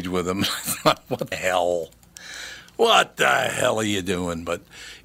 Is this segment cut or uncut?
cut